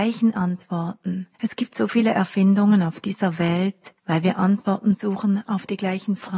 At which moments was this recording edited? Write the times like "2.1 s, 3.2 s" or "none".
1.3 s, 4.0 s